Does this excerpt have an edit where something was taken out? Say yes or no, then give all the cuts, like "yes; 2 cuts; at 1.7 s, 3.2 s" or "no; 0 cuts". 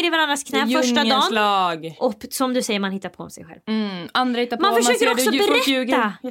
no; 0 cuts